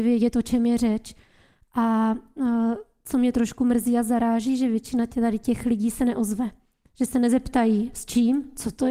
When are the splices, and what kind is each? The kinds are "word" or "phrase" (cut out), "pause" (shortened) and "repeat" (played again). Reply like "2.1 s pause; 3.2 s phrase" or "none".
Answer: none